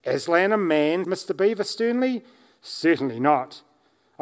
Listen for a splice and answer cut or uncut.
cut